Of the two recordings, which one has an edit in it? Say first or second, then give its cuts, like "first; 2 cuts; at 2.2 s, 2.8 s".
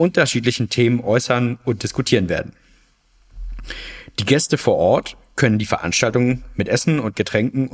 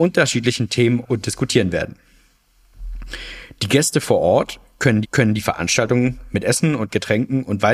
second; 2 cuts; at 1.0 s, 5.0 s